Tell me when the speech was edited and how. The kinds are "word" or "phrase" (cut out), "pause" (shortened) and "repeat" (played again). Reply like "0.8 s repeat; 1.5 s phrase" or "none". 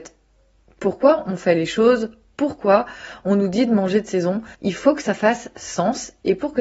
4.5 s pause